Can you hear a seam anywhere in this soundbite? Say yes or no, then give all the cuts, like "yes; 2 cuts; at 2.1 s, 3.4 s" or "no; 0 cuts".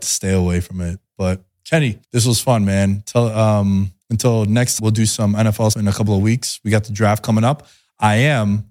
yes; 4 cuts; at 2.0 s, 4.0 s, 4.8 s, 5.7 s